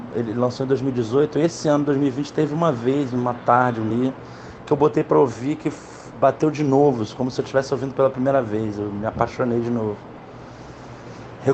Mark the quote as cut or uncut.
cut